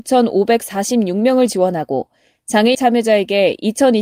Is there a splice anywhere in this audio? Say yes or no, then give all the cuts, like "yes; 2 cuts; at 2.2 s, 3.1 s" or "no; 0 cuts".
yes; 1 cut; at 2.7 s